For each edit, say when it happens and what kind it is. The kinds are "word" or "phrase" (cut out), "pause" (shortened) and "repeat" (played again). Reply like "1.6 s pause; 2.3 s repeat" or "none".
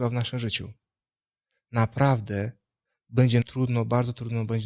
3.4 s word